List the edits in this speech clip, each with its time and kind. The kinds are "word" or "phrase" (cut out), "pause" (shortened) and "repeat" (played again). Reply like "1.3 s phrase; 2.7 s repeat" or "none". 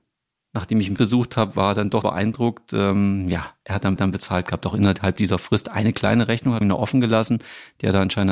1.0 s word; 2.0 s word; 4.0 s repeat; 6.6 s phrase